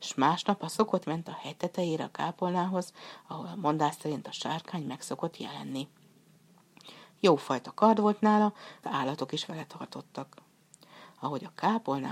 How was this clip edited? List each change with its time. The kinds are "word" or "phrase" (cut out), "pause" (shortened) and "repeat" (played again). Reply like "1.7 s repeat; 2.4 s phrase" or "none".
1.0 s phrase; 8.8 s word